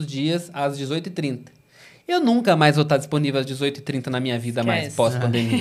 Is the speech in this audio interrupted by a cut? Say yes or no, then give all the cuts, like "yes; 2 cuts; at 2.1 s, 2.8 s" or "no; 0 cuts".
no; 0 cuts